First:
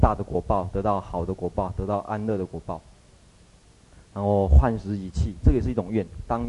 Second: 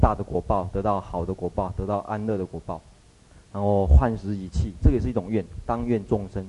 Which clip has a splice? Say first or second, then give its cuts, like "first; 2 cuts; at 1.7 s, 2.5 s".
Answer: second; 1 cut; at 3.0 s